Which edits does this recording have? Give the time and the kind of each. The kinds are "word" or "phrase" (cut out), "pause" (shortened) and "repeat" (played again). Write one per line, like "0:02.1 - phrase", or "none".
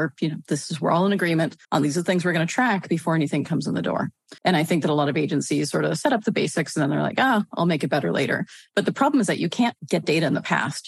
0:01.6 - pause
0:04.4 - pause
0:09.8 - pause